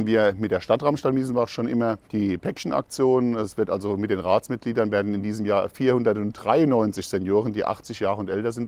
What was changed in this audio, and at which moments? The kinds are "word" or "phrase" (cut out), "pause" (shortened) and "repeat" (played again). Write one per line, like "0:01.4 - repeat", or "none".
0:02.0 - pause